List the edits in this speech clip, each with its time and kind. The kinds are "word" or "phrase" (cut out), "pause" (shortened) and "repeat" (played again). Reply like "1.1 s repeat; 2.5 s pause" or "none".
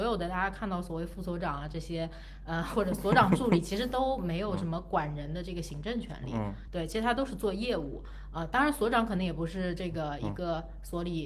none